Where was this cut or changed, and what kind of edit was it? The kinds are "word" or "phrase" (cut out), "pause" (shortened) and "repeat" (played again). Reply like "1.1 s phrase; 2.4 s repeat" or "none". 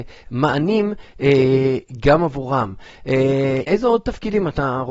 3.7 s word